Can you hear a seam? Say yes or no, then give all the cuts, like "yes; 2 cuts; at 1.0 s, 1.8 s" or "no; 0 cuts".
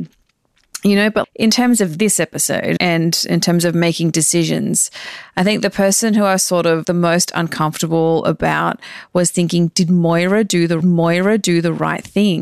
yes; 4 cuts; at 1.2 s, 2.8 s, 6.8 s, 10.8 s